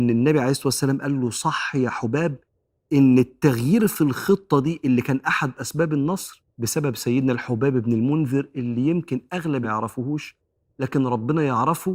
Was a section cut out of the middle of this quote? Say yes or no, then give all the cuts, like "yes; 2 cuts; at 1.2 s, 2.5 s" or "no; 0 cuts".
yes; 3 cuts; at 5.6 s, 6.5 s, 9.6 s